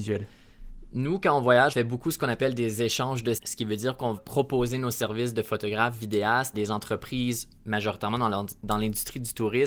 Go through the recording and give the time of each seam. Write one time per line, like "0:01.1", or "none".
0:01.7
0:03.4
0:04.2
0:06.5